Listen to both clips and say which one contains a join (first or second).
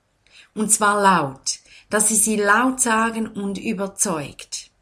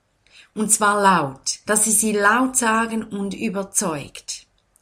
second